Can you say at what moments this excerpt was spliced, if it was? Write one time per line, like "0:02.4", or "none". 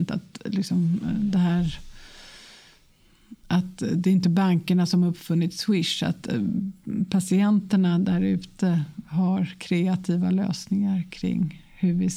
0:03.4